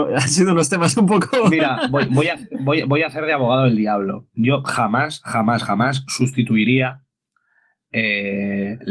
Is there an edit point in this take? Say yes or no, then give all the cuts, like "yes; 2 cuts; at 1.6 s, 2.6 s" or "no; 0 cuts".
no; 0 cuts